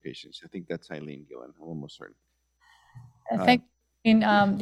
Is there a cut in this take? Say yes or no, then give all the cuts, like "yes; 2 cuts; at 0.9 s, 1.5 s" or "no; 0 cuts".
no; 0 cuts